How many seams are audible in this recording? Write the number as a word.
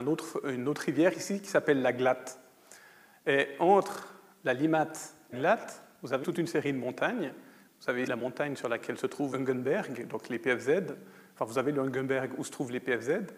four